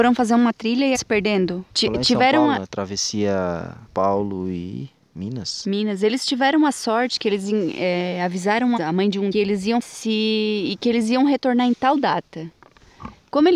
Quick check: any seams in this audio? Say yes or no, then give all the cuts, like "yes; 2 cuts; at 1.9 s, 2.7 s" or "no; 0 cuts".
yes; 6 cuts; at 0.9 s, 1.7 s, 3.9 s, 8.8 s, 9.3 s, 9.8 s